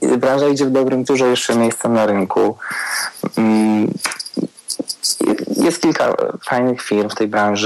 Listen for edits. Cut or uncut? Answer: cut